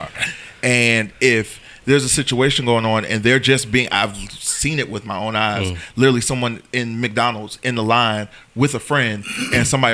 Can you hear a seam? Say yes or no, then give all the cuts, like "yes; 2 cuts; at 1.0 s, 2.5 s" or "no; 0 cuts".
no; 0 cuts